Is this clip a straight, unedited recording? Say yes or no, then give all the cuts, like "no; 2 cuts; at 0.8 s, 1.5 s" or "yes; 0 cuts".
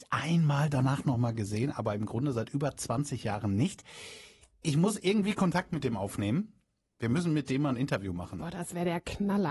yes; 0 cuts